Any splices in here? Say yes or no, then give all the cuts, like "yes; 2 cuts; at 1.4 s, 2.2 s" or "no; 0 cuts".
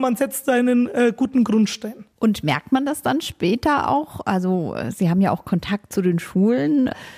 yes; 1 cut; at 2.1 s